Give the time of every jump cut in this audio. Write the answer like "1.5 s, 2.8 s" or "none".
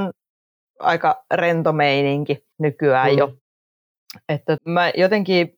2.5 s, 4.6 s